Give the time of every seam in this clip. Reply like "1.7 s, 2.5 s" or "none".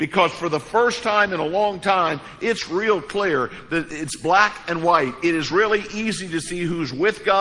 none